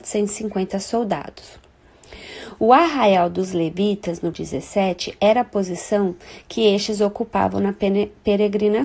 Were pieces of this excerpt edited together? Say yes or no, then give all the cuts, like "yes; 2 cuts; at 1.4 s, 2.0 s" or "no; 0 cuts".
yes; 1 cut; at 4.3 s